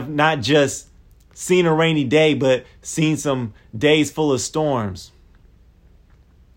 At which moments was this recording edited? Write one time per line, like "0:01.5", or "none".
none